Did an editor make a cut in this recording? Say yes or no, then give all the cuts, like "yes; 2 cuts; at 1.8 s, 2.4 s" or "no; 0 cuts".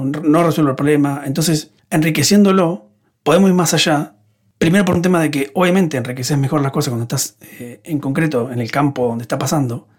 no; 0 cuts